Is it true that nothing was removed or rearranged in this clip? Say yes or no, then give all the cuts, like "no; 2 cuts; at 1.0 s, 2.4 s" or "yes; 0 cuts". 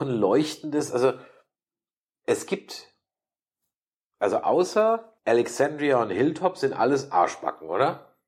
no; 1 cut; at 5.2 s